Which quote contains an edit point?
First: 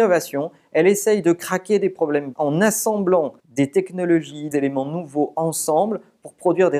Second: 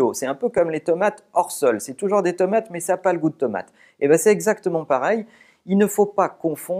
first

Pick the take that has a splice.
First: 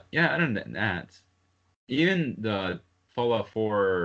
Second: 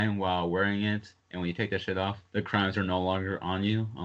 second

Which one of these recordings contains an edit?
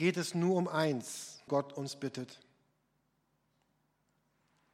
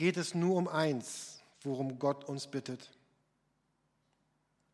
first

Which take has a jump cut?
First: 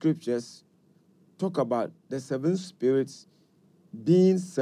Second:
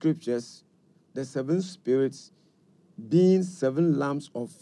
second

